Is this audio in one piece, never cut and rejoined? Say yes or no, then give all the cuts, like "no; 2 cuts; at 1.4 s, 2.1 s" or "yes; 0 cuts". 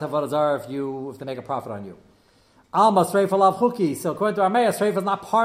yes; 0 cuts